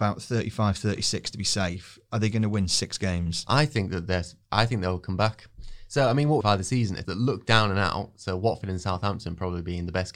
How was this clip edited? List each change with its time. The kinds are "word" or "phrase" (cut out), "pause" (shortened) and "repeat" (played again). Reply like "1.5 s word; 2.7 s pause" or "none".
6.4 s phrase; 7.0 s word

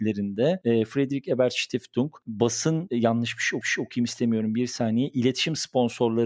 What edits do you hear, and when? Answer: 3.6 s repeat

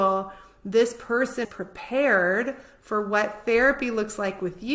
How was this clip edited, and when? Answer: 1.4 s word

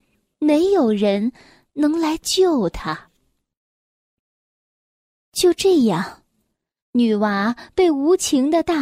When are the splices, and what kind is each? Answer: none

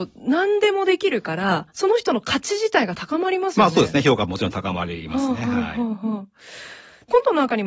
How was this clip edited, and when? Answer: 1.7 s pause

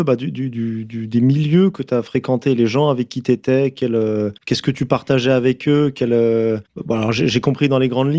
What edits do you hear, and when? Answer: 4.4 s pause; 6.6 s pause

